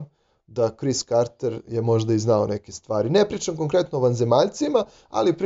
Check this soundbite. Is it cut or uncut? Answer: uncut